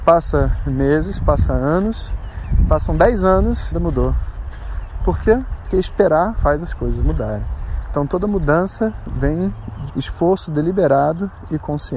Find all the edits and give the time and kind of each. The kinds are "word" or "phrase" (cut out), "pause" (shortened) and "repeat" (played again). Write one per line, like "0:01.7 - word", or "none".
0:03.7 - word
0:06.4 - word
0:09.9 - word